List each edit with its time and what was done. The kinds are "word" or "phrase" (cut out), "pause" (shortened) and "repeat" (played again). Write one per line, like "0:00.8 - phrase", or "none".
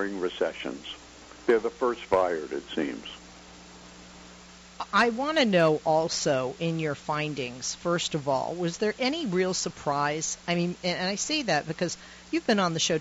none